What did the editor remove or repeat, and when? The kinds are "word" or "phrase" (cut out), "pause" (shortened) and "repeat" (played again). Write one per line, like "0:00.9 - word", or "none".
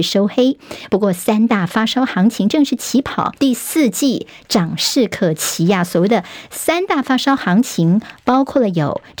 0:03.4 - pause

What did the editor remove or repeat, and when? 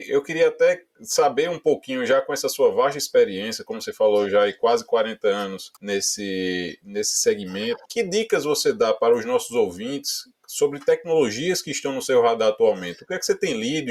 0:05.8 - pause
0:07.8 - pause

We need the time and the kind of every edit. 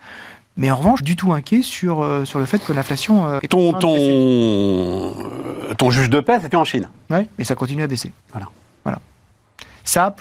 0:01.0 - phrase
0:03.4 - word
0:06.5 - phrase
0:08.2 - pause

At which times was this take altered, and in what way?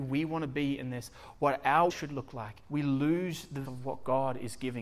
0:01.9 - word
0:02.6 - pause
0:03.6 - word

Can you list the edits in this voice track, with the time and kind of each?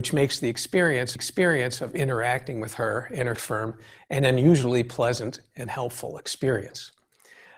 0:01.2 - repeat
0:03.4 - word

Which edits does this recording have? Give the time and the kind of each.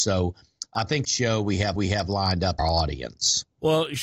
0:01.0 - phrase
0:01.8 - repeat
0:02.6 - phrase

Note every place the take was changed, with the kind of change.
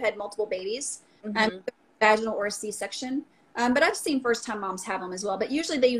none

